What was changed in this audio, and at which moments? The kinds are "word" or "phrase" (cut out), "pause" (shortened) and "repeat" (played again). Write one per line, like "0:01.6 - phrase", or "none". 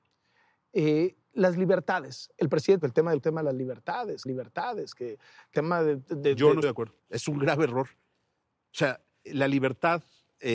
0:01.2 - pause
0:02.3 - pause
0:02.8 - phrase
0:03.2 - phrase
0:04.3 - repeat
0:05.5 - word
0:06.6 - word
0:07.0 - pause
0:09.2 - word